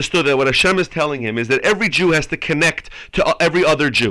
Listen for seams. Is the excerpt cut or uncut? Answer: uncut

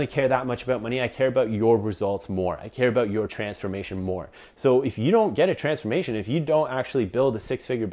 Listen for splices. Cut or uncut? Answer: uncut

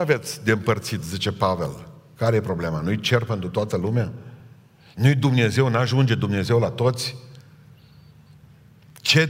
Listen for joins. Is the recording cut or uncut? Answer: uncut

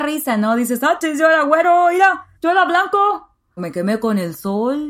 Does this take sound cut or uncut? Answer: cut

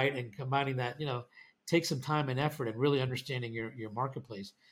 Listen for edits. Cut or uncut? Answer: uncut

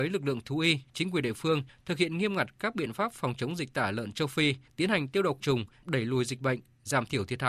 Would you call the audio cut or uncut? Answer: cut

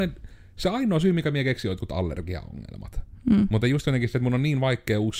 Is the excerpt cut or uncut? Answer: uncut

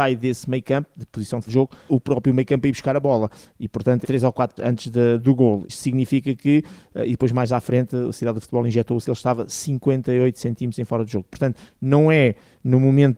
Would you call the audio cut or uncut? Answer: cut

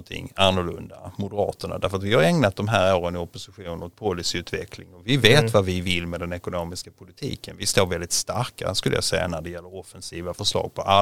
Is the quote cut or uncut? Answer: uncut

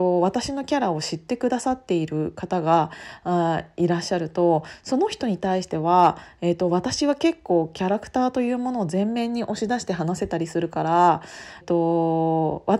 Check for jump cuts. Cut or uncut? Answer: cut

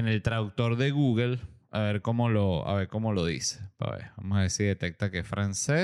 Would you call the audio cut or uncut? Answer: uncut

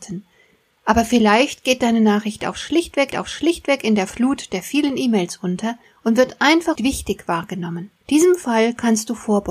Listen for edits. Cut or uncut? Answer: cut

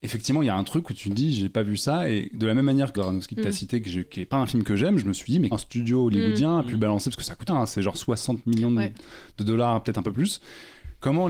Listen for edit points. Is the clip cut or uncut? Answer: cut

